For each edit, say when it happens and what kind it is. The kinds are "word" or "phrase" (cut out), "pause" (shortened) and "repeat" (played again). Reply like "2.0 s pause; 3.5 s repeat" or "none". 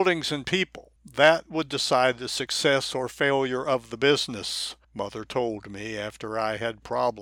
1.0 s pause; 4.8 s pause